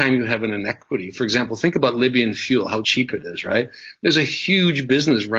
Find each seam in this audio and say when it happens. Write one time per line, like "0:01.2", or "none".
none